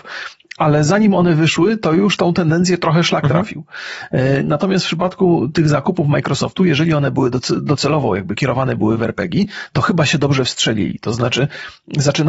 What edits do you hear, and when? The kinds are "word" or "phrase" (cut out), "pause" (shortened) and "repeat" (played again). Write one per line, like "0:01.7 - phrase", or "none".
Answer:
none